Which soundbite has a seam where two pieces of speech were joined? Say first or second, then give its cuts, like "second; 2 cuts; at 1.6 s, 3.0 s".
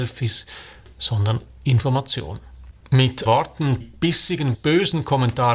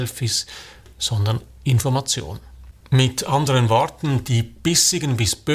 first; 3 cuts; at 3.3 s, 3.8 s, 4.5 s